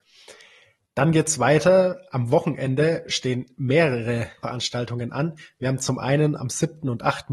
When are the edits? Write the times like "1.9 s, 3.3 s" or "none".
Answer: none